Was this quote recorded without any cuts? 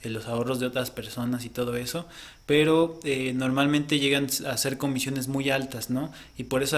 yes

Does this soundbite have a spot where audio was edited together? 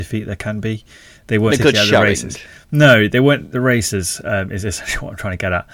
yes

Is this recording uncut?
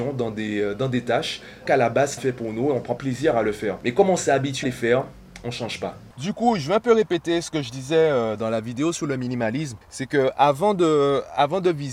no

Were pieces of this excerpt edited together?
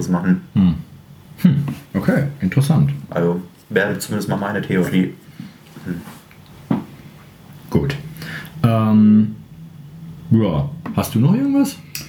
yes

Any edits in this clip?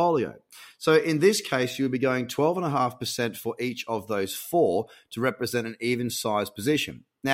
no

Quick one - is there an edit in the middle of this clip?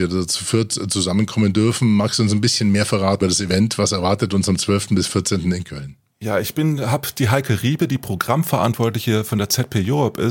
yes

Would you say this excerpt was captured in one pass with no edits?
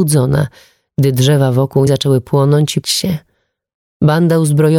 no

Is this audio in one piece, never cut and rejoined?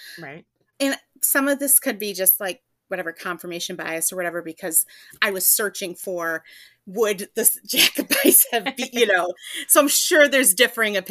yes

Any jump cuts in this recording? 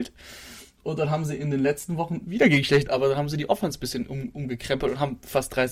yes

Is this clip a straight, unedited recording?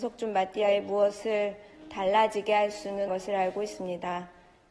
no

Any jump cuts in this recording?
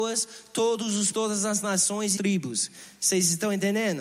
yes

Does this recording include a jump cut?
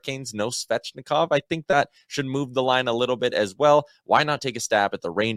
no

